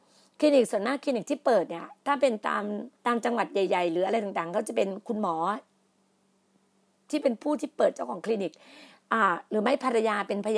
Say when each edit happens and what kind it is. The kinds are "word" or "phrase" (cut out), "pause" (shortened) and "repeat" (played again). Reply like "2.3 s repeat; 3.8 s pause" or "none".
2.9 s pause